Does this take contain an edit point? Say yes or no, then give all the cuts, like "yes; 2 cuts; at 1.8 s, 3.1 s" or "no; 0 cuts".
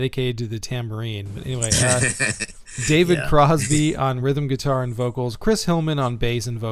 no; 0 cuts